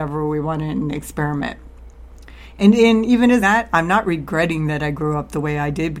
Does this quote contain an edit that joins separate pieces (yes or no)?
yes